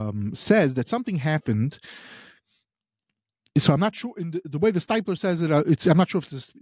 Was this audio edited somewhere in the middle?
no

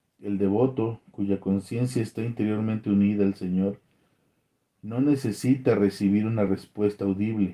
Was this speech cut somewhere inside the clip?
no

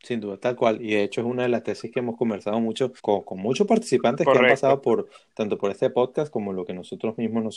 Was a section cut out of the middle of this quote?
yes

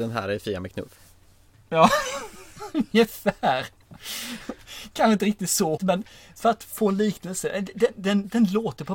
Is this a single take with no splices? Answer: no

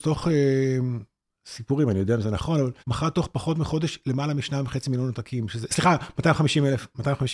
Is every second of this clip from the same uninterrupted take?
no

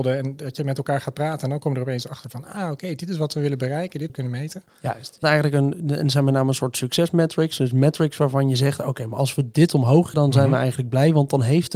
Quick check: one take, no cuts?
no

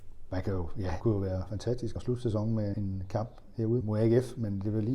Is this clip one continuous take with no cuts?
no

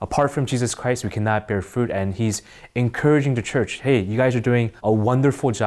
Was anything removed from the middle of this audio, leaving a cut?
yes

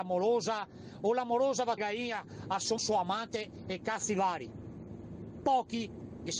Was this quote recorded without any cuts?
no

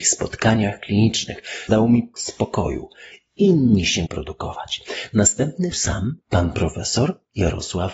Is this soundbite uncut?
no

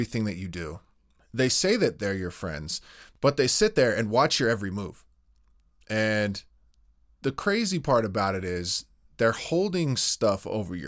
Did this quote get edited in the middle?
no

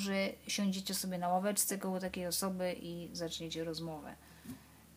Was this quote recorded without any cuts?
yes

